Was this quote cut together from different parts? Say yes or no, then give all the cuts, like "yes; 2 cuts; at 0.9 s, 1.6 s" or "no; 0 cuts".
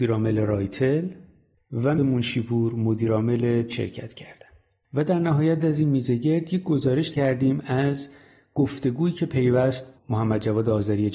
yes; 5 cuts; at 2.0 s, 3.7 s, 5.6 s, 7.1 s, 9.9 s